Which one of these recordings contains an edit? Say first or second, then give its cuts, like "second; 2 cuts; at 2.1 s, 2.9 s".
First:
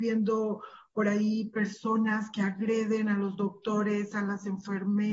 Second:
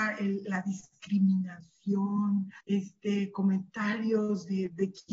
second; 1 cut; at 2.6 s